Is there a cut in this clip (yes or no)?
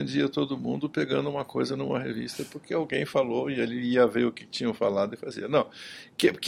no